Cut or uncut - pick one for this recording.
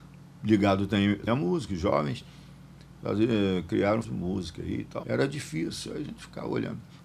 cut